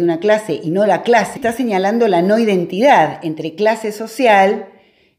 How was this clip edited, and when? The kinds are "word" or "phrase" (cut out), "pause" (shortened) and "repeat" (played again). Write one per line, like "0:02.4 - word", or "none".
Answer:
0:01.4 - phrase